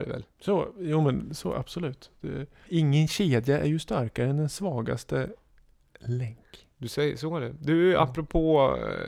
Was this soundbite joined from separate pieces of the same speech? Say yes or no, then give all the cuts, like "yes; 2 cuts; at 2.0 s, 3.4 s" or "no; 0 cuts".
yes; 2 cuts; at 2.7 s, 6.7 s